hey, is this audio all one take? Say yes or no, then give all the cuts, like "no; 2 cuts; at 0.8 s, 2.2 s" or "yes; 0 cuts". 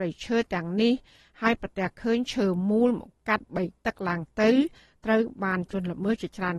yes; 0 cuts